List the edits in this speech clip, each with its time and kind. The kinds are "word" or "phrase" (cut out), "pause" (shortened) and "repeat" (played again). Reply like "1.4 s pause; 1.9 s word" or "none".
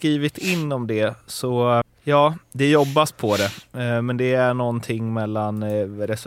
1.8 s word